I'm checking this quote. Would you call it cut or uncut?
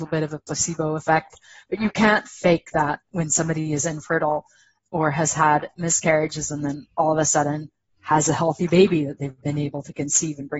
uncut